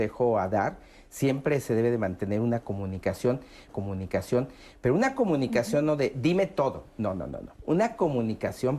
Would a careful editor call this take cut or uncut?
cut